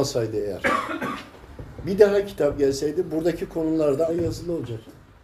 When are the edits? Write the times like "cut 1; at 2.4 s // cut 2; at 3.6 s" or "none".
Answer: cut 1; at 4.1 s